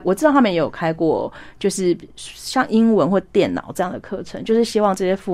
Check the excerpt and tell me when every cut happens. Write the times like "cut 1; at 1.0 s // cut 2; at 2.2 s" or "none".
none